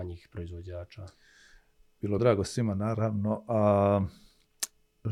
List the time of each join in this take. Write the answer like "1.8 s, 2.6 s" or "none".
2.2 s